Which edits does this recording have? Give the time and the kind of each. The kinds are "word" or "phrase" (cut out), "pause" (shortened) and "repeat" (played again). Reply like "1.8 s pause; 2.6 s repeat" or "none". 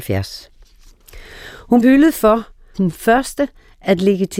1.8 s word; 2.7 s word